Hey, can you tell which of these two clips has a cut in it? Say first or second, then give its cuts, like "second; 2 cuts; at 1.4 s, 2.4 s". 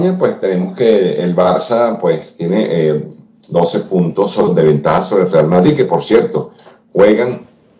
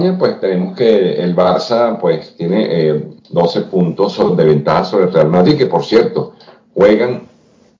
second; 1 cut; at 3.2 s